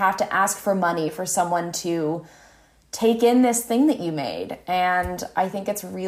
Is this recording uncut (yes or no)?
yes